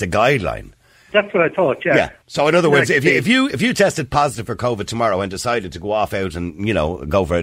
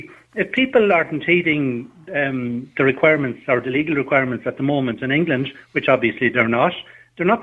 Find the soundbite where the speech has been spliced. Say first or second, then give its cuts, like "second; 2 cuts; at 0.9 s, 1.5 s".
first; 1 cut; at 2.2 s